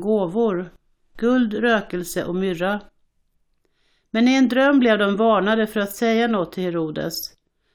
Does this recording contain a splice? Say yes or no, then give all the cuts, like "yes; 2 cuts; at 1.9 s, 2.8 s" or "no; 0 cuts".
no; 0 cuts